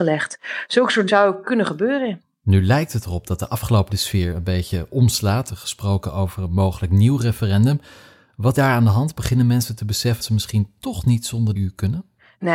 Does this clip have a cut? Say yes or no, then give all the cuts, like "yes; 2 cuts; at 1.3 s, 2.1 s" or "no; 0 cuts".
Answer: yes; 6 cuts; at 1.1 s, 3.9 s, 5.5 s, 8.5 s, 10.2 s, 11.6 s